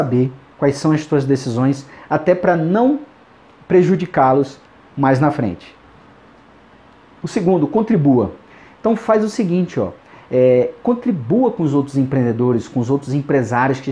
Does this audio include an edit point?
no; 0 cuts

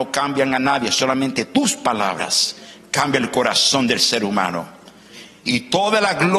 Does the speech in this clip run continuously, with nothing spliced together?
yes; 0 cuts

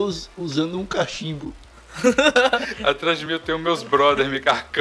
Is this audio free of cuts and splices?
yes; 0 cuts

